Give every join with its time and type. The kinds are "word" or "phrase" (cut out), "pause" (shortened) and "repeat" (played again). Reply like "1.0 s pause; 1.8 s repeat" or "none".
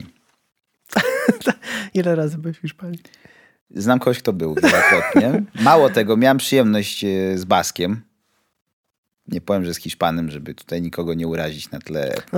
none

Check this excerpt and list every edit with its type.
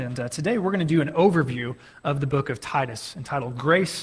none

